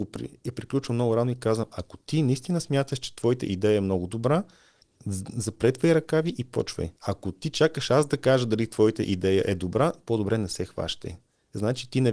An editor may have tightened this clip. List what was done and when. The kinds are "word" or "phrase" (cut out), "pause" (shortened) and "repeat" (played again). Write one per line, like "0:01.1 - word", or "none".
0:04.8 - pause
0:07.0 - pause